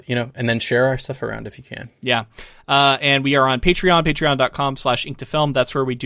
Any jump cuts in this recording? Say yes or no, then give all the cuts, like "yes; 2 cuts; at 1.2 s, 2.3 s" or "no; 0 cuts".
no; 0 cuts